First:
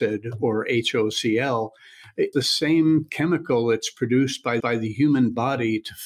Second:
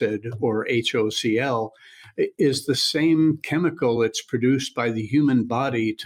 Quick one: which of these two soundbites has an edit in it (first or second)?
first